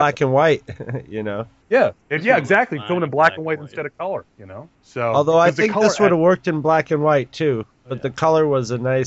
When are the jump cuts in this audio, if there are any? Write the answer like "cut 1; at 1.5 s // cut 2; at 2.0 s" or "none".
none